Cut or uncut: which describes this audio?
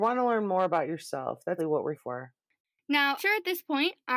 cut